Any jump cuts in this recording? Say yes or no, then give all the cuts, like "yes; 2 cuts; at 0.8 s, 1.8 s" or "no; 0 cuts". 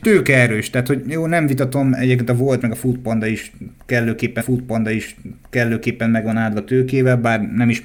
yes; 2 cuts; at 2.6 s, 4.4 s